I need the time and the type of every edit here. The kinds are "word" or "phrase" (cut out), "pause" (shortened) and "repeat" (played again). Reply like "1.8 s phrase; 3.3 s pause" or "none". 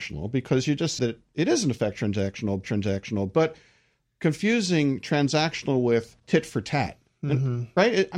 1.0 s word; 2.6 s repeat; 6.2 s pause